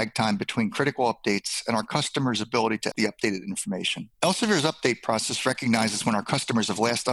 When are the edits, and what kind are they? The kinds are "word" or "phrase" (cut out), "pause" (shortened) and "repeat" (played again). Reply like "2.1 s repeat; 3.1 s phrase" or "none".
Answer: 2.9 s word; 4.1 s pause